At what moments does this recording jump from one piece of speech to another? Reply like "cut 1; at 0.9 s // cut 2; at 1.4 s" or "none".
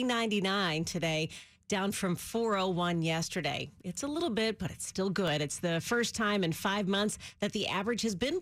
none